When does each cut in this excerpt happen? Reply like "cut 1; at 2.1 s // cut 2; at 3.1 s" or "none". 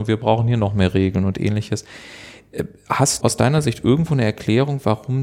cut 1; at 3.2 s

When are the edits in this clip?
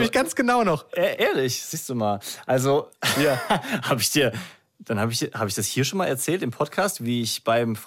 none

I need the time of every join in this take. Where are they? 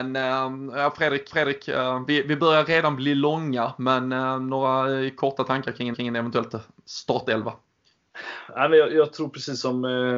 cut 1; at 1.3 s // cut 2; at 5.9 s

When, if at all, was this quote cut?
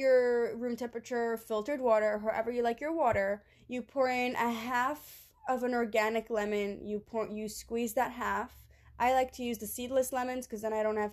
none

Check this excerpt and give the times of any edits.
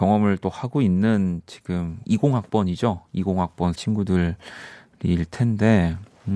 cut 1; at 2.0 s // cut 2; at 3.7 s

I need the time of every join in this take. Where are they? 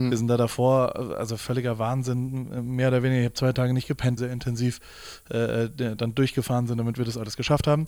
cut 1; at 4.2 s

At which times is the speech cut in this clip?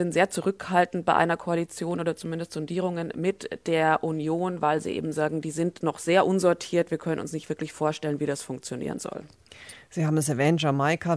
none

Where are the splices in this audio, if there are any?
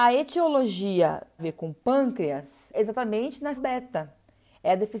cut 1; at 1.4 s // cut 2; at 2.7 s // cut 3; at 3.6 s

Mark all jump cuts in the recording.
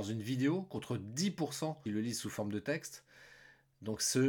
cut 1; at 1.9 s

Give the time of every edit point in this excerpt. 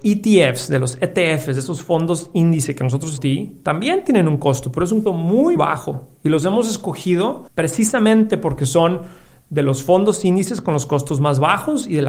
cut 1; at 3.2 s // cut 2; at 5.1 s // cut 3; at 5.6 s // cut 4; at 7.5 s

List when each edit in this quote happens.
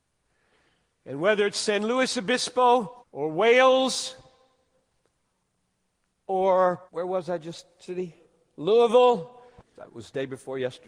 cut 1; at 3.0 s // cut 2; at 6.9 s // cut 3; at 9.6 s

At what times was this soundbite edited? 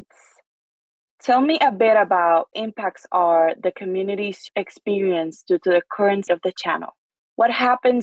cut 1; at 2.5 s // cut 2; at 3.6 s // cut 3; at 4.5 s // cut 4; at 6.3 s // cut 5; at 7.1 s

